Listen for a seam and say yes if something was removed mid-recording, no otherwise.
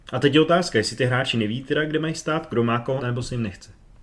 yes